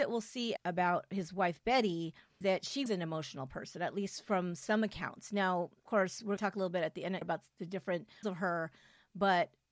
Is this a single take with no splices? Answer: no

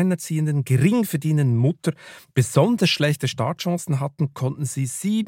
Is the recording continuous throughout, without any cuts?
yes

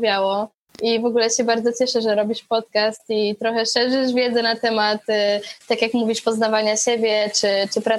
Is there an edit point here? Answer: no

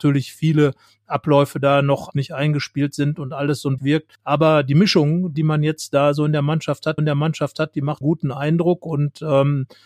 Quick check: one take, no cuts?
no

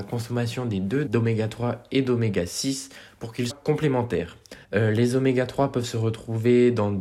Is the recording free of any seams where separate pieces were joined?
no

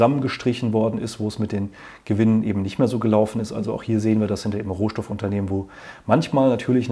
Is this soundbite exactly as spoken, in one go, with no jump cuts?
yes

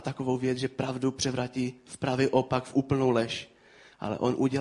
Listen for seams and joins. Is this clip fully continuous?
yes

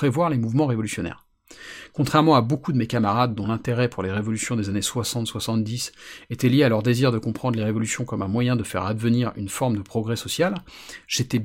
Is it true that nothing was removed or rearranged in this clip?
yes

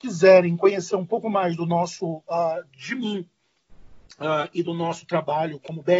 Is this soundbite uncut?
yes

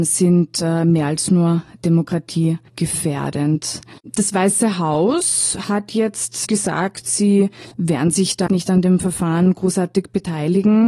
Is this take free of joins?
no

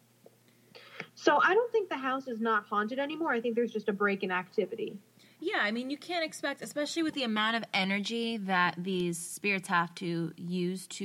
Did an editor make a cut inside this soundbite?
no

